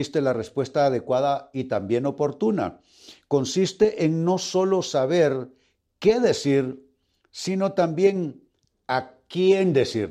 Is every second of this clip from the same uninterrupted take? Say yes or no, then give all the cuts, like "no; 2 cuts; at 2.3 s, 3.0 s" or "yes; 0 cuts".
yes; 0 cuts